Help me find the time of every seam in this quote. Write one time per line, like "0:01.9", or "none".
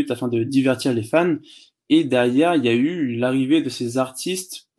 none